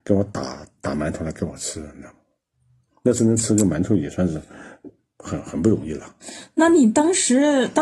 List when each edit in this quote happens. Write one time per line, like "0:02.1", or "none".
none